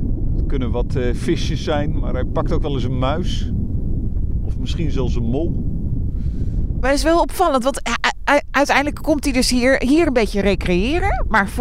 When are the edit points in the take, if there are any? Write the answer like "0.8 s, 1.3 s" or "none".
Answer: none